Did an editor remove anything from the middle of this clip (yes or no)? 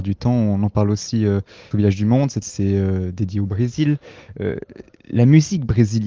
yes